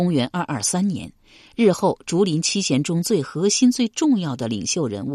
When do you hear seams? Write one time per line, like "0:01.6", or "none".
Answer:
none